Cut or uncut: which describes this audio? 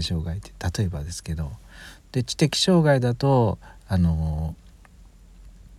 uncut